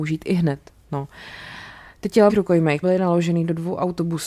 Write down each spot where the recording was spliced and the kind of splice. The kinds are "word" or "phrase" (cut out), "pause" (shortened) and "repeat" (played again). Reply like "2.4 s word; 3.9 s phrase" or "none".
2.3 s word; 2.8 s word